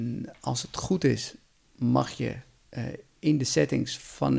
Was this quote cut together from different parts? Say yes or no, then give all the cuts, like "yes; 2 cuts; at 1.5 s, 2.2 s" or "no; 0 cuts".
no; 0 cuts